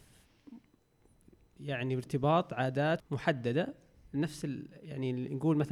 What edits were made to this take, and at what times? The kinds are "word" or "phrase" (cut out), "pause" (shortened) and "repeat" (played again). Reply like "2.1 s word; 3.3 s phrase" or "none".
3.0 s word